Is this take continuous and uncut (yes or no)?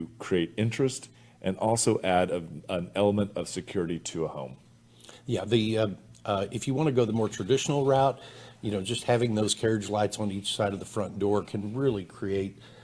yes